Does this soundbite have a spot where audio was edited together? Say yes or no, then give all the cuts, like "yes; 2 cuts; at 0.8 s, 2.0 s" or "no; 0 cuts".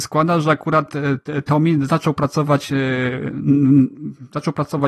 no; 0 cuts